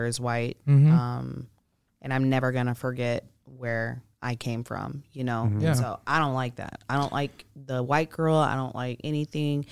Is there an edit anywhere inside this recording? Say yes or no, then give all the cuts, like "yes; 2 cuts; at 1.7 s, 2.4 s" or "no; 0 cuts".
no; 0 cuts